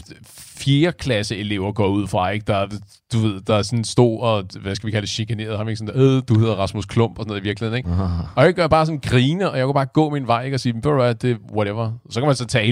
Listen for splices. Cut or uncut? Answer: uncut